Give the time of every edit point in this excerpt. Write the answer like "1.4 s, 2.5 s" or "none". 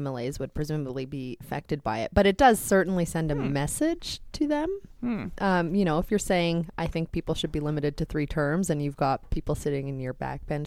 1.4 s